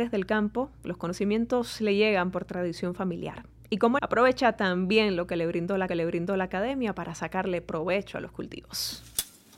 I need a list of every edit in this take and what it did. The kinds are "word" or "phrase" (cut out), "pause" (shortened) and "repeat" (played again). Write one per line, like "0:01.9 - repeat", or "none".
0:04.0 - phrase
0:05.9 - repeat